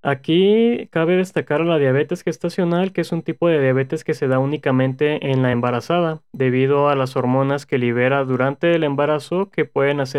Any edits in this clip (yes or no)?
no